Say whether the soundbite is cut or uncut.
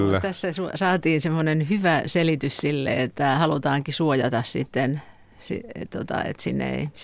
uncut